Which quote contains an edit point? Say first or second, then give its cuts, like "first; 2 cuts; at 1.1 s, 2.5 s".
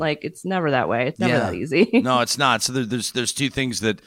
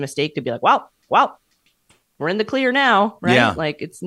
second; 1 cut; at 1.1 s